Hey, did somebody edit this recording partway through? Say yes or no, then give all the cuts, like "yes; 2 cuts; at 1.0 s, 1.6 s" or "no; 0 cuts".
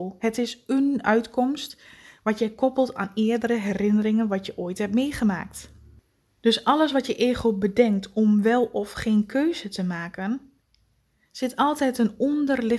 no; 0 cuts